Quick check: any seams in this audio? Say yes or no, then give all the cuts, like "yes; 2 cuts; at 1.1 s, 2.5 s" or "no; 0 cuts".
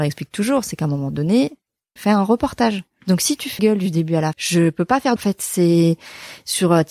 yes; 4 cuts; at 2.0 s, 3.6 s, 4.3 s, 5.2 s